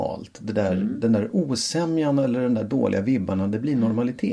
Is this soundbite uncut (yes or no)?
yes